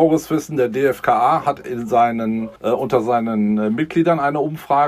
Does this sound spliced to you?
yes; 1 cut; at 2.6 s

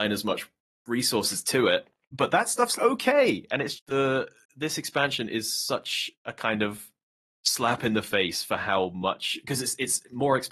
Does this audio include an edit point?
yes; 3 cuts; at 2.8 s, 3.8 s, 6.1 s

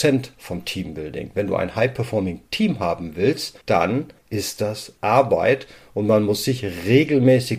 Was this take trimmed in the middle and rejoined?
yes; 1 cut; at 3.6 s

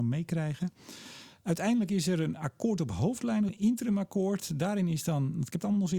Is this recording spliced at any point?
yes; 1 cut; at 3.5 s

